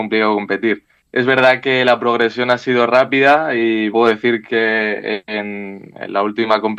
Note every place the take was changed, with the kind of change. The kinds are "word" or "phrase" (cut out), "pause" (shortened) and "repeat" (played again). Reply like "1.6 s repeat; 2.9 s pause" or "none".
1.0 s pause; 3.9 s word

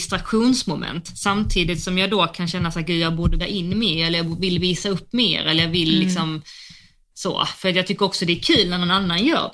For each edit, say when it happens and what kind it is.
3.4 s word

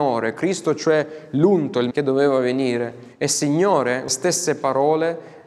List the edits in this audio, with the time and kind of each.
1.9 s word; 3.1 s pause; 4.1 s word

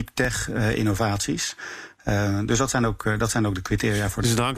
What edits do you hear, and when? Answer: none

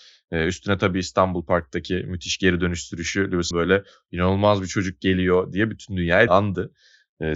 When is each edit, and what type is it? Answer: 3.5 s word; 6.3 s word

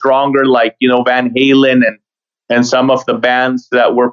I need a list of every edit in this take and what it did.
none

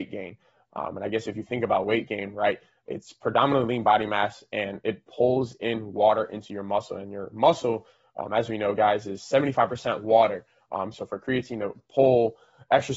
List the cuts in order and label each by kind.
none

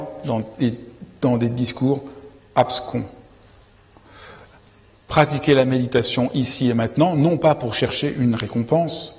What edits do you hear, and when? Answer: none

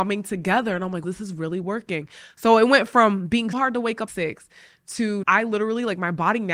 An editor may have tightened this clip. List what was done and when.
1.0 s word; 3.5 s word; 4.1 s word; 5.2 s word

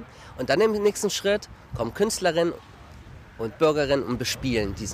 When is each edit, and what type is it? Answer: none

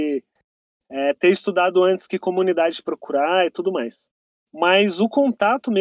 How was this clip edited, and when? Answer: none

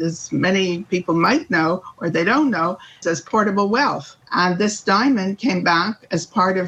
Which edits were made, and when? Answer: 3.0 s phrase; 4.2 s pause

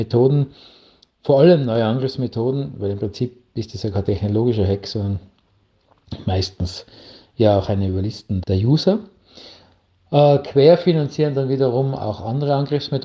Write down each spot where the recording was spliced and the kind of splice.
8.4 s word

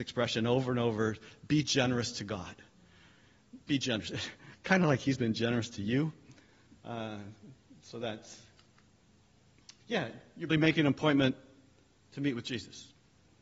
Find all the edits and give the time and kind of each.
3.6 s pause; 9.8 s pause; 10.5 s word

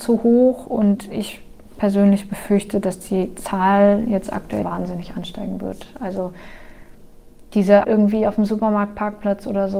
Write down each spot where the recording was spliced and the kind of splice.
4.6 s phrase; 7.8 s word

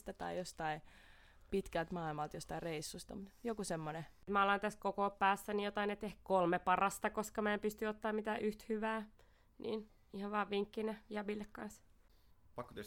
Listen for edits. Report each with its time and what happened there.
none

